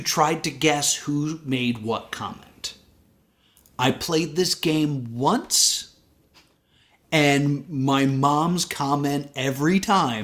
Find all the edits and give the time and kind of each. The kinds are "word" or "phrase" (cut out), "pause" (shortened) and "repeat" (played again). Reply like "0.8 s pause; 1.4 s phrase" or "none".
none